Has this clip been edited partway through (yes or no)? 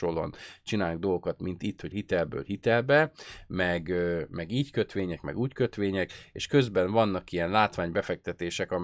yes